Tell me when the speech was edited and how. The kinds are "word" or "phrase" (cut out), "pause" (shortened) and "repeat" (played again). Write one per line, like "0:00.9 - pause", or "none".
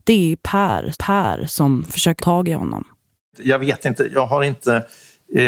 0:00.9 - repeat
0:02.2 - word
0:03.2 - pause